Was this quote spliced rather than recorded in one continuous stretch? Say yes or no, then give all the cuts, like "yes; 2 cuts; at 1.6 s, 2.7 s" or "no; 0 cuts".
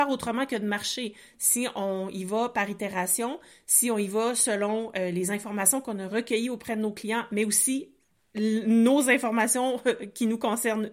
no; 0 cuts